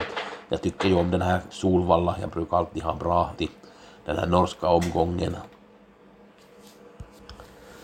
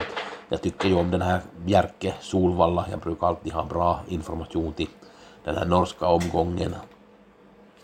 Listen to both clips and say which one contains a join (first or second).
first